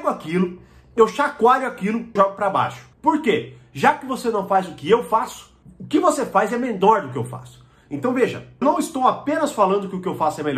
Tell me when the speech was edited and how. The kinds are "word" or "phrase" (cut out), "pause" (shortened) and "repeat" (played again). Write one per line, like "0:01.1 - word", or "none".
0:02.2 - word
0:02.9 - pause
0:05.6 - pause
0:08.6 - word